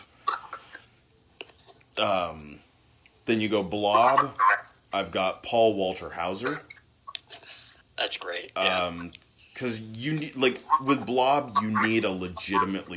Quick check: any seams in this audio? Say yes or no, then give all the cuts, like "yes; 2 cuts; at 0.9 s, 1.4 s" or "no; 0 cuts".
yes; 1 cut; at 7.8 s